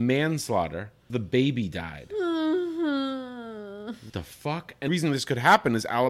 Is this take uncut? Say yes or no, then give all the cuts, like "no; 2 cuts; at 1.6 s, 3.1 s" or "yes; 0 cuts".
no; 3 cuts; at 1.1 s, 4.1 s, 4.9 s